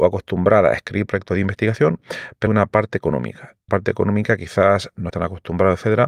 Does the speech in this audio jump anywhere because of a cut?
yes; 3 cuts; at 2.5 s, 3.7 s, 5.1 s

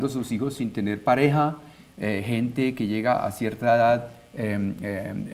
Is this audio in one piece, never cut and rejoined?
yes; 0 cuts

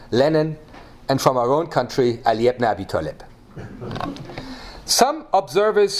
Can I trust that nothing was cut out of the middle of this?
yes; 0 cuts

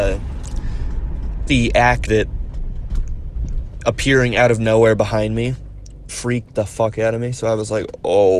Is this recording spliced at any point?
yes; 3 cuts; at 1.5 s, 2.1 s, 6.1 s

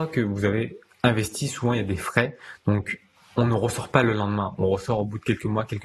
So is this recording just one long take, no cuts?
yes; 0 cuts

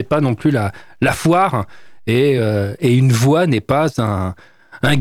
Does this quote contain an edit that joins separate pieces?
no; 0 cuts

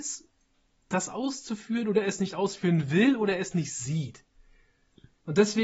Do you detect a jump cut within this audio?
no; 0 cuts

